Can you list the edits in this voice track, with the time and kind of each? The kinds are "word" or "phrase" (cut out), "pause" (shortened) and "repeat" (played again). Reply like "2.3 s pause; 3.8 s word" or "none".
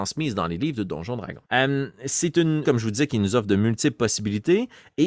1.5 s pause; 2.6 s phrase